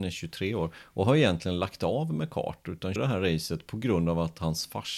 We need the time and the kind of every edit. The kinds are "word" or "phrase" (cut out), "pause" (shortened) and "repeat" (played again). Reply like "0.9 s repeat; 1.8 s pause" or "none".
3.0 s word